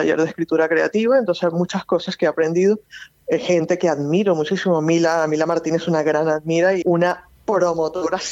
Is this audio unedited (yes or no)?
no